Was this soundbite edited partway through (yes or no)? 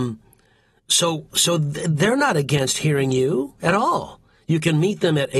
no